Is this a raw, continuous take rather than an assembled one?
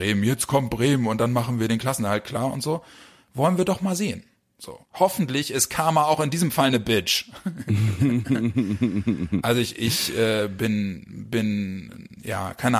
no; 1 cut; at 4.8 s

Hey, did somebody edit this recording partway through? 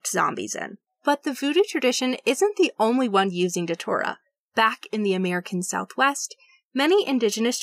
no; 0 cuts

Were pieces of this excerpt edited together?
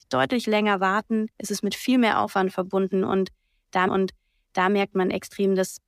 yes; 2 cuts; at 1.3 s, 3.9 s

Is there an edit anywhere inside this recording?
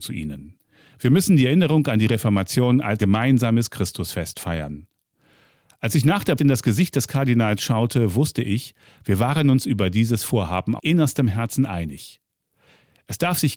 yes; 3 cuts; at 3.0 s, 6.4 s, 10.8 s

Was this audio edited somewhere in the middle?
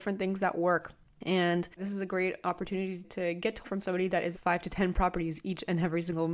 yes; 3 cuts; at 3.0 s, 3.6 s, 4.3 s

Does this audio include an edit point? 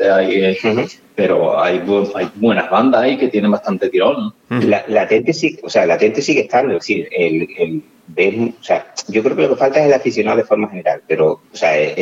no; 0 cuts

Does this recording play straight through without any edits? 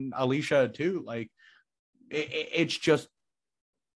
yes; 0 cuts

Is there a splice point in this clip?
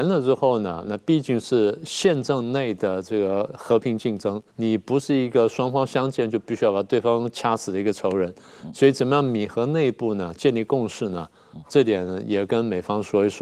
yes; 1 cut; at 4.5 s

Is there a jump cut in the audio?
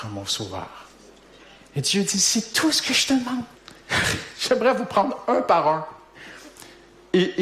yes; 1 cut; at 3.6 s

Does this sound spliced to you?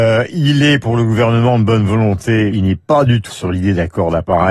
yes; 2 cuts; at 2.5 s, 3.3 s

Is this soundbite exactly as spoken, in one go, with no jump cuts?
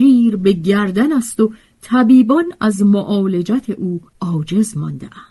no; 1 cut; at 4.1 s

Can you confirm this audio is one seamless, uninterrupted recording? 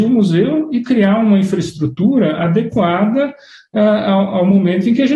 yes; 0 cuts

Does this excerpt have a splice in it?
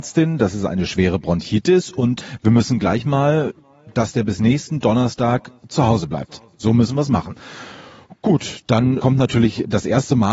yes; 1 cut; at 9.0 s

